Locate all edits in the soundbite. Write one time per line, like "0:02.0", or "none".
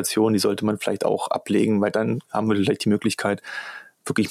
none

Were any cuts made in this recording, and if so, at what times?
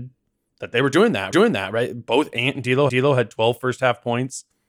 0:01.3
0:02.9

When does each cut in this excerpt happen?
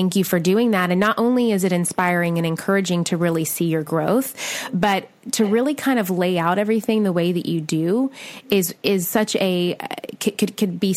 none

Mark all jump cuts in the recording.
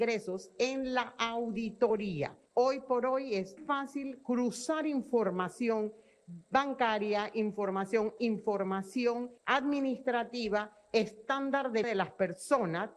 0:02.5
0:03.6
0:08.2
0:09.4
0:11.8

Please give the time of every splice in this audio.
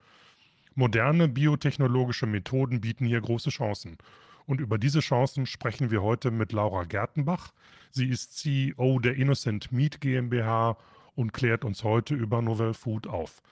none

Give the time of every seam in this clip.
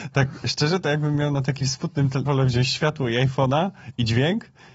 0:02.3

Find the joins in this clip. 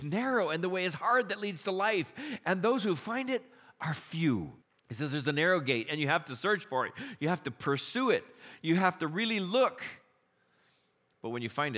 0:04.6

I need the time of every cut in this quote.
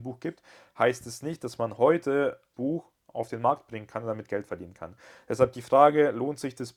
0:02.5

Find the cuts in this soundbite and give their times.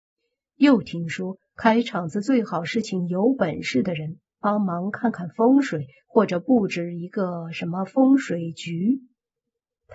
none

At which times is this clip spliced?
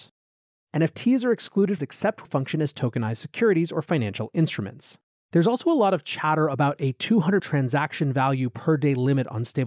0:01.8
0:02.2
0:05.1
0:07.4

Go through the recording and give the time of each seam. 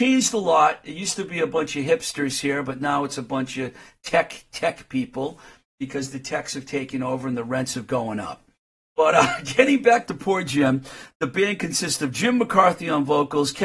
none

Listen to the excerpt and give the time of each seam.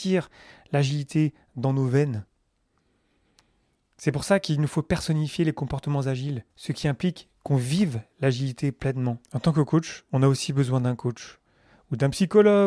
0:06.5
0:09.2

